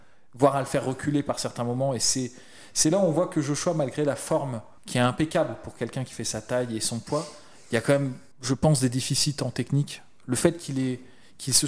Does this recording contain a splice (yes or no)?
yes